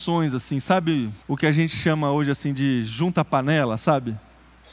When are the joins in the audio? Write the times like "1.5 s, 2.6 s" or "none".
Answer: 1.2 s